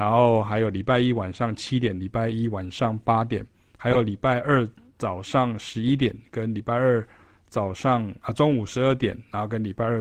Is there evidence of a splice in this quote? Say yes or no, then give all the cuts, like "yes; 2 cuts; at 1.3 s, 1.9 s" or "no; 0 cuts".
no; 0 cuts